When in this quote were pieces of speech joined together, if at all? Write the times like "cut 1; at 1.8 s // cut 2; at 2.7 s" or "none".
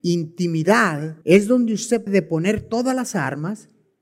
cut 1; at 1.2 s // cut 2; at 2.1 s